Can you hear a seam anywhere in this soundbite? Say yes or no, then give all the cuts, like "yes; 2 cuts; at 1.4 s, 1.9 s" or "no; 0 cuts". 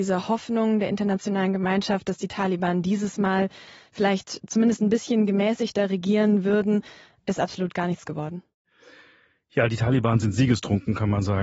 no; 0 cuts